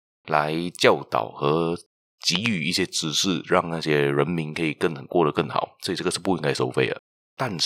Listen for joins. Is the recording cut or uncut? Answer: uncut